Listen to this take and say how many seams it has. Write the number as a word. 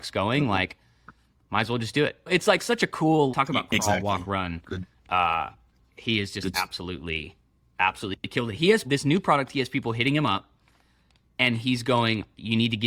three